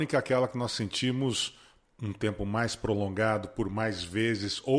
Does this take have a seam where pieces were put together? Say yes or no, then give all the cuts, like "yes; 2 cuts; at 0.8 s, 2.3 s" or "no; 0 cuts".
no; 0 cuts